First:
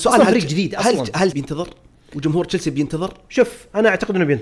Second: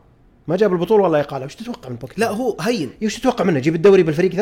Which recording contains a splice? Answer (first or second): first